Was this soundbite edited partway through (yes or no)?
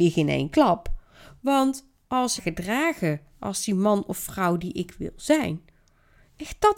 yes